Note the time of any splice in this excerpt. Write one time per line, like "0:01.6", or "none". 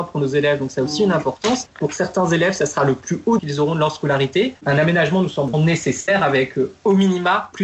0:03.4
0:05.5